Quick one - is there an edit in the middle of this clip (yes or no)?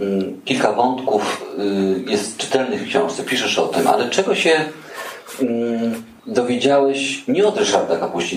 yes